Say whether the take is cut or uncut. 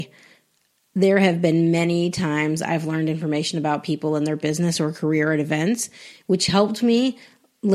uncut